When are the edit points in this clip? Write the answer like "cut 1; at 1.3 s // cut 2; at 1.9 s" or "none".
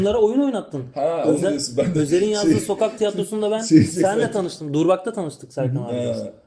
none